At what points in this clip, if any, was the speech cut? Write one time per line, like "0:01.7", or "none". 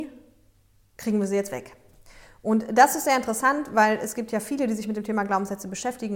none